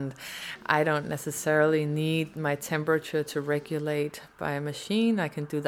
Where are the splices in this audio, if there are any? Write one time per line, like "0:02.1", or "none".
none